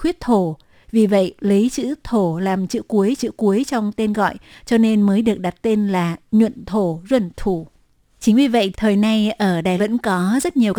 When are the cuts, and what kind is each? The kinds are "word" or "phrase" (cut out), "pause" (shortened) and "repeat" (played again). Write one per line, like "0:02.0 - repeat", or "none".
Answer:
0:03.2 - repeat
0:08.7 - word
0:09.8 - word